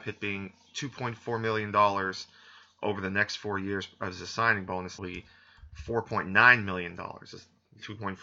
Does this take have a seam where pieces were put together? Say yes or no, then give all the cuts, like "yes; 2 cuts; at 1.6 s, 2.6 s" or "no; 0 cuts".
yes; 1 cut; at 5.0 s